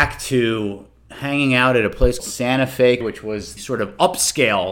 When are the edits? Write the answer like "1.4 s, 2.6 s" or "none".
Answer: 2.2 s, 3.0 s, 3.6 s